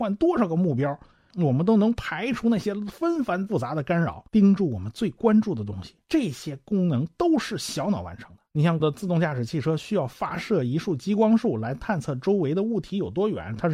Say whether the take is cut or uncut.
cut